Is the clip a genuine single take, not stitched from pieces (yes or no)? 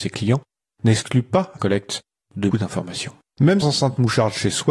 no